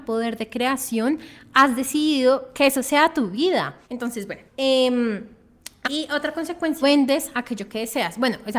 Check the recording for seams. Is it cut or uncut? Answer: cut